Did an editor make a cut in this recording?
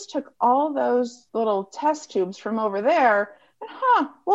yes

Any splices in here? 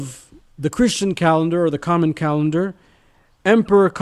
no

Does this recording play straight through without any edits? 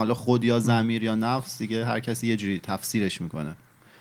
yes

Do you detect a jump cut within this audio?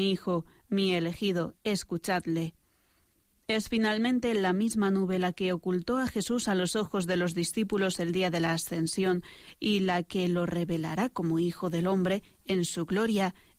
no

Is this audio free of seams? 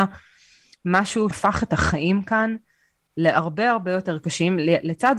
no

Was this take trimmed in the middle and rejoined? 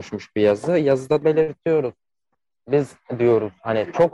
yes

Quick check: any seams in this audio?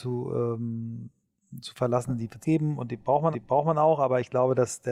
yes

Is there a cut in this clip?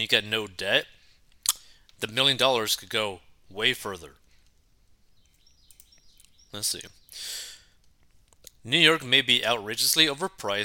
no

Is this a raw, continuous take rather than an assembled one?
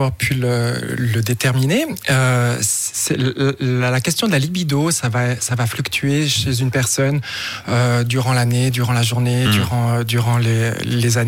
yes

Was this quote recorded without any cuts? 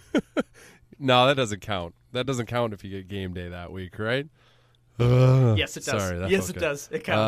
yes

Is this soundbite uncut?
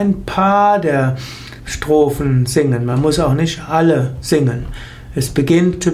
yes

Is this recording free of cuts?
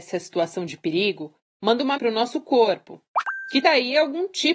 no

